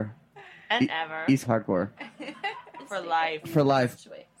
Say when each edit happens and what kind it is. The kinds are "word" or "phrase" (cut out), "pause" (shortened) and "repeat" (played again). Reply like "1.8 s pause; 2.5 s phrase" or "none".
1.4 s word